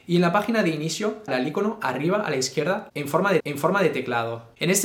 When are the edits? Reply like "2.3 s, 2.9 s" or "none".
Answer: 1.3 s, 3.4 s